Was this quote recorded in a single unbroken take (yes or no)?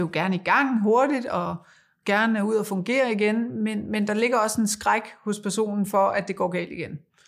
yes